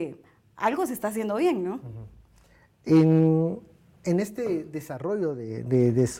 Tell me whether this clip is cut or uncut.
uncut